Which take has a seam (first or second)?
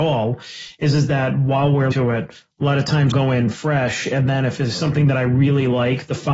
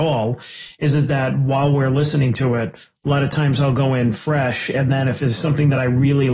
first